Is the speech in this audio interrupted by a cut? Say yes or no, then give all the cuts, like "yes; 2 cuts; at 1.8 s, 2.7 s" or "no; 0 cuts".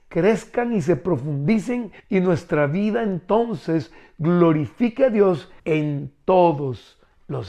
yes; 2 cuts; at 2.0 s, 5.6 s